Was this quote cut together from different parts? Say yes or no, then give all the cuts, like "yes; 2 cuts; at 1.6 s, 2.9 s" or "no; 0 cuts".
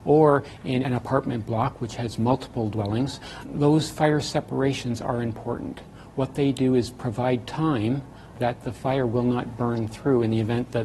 no; 0 cuts